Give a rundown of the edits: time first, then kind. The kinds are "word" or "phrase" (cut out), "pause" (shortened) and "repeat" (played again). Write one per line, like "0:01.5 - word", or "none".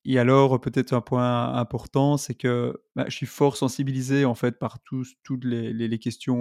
none